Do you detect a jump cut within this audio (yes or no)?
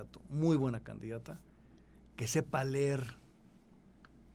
no